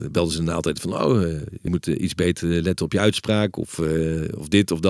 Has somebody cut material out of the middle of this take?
yes; 1 cut; at 1.7 s

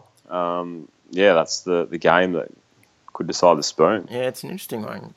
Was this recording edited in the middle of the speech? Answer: no; 0 cuts

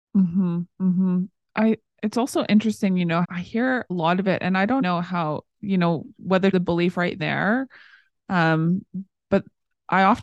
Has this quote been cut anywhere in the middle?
yes; 6 cuts; at 3.2 s, 3.9 s, 4.8 s, 5.5 s, 6.5 s, 7.2 s

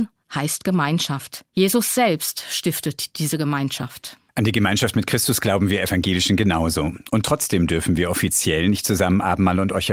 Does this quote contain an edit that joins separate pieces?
yes; 2 cuts; at 1.5 s, 4.3 s

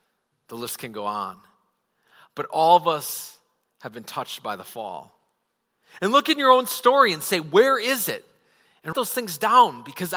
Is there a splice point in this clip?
yes; 1 cut; at 8.9 s

